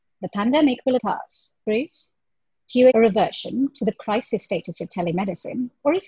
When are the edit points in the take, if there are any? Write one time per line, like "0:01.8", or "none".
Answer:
0:01.0
0:01.6
0:02.9
0:03.9